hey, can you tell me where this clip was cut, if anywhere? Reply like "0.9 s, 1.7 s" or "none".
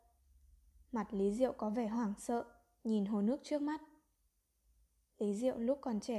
none